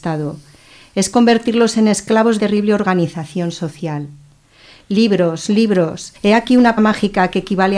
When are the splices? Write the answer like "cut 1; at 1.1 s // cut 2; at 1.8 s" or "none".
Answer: cut 1; at 2.4 s // cut 2; at 6.2 s // cut 3; at 6.8 s